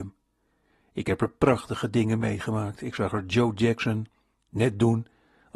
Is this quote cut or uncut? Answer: uncut